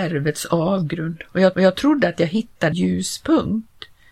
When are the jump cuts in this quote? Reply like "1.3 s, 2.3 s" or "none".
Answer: 1.5 s, 2.7 s